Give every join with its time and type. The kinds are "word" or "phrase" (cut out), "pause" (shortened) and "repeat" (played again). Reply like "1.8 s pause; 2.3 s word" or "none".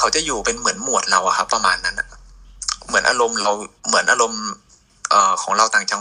3.8 s pause